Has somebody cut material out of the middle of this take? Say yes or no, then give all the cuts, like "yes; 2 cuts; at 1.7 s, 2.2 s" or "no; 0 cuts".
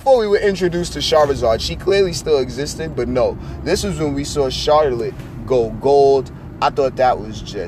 no; 0 cuts